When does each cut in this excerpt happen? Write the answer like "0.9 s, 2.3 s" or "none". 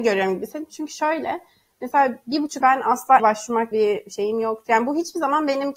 2.6 s, 3.2 s, 3.7 s